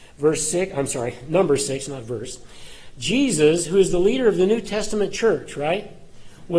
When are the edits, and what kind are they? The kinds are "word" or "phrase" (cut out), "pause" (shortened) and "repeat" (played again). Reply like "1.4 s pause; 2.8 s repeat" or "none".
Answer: none

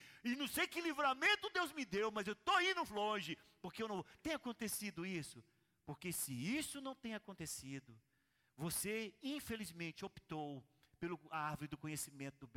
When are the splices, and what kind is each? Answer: none

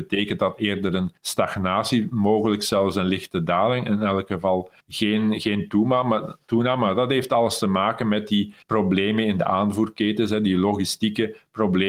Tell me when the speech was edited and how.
1.2 s pause; 4.8 s pause; 8.6 s pause

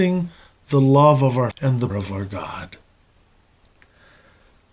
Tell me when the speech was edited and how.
1.5 s word; 1.9 s word

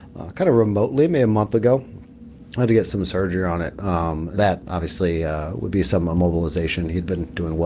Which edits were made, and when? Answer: 4.4 s word

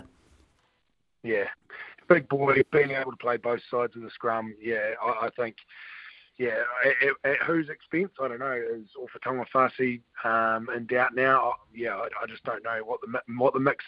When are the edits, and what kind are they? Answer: none

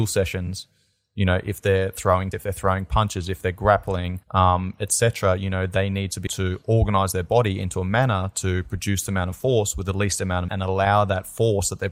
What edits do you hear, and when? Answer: 2.3 s word; 4.2 s pause; 6.3 s word; 9.1 s word; 10.5 s word

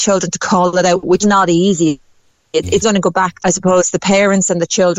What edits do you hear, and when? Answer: 1.2 s word; 2.8 s word; 3.4 s word

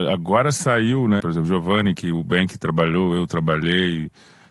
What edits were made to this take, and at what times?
1.2 s phrase

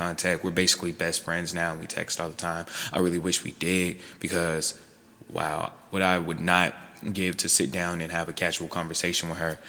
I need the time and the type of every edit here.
none

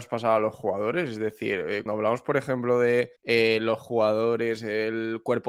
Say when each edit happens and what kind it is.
1.9 s word; 3.2 s pause

